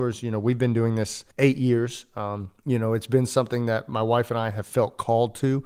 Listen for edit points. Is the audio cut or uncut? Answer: cut